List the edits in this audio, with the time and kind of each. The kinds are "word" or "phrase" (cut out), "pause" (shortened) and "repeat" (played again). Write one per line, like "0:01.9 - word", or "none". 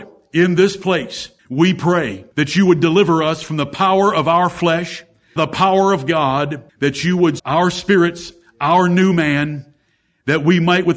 0:01.4 - pause
0:02.3 - pause
0:05.4 - phrase
0:06.7 - pause
0:07.4 - phrase